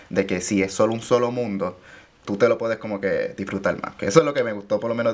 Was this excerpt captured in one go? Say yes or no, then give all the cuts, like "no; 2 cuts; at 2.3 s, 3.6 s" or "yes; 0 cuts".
no; 1 cut; at 2.2 s